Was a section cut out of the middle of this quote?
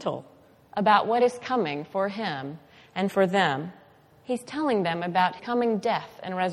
yes; 1 cut; at 5.4 s

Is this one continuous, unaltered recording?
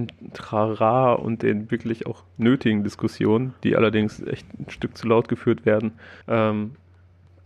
no; 1 cut; at 6.2 s

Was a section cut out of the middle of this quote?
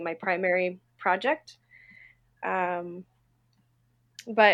no; 0 cuts

